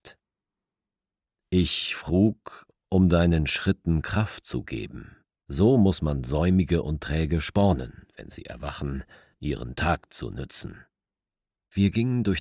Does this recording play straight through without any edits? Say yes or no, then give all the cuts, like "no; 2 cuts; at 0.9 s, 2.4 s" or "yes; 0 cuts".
yes; 0 cuts